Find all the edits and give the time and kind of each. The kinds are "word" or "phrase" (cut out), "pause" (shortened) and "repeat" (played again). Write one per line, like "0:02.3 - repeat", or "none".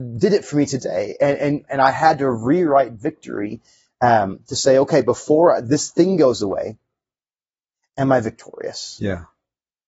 none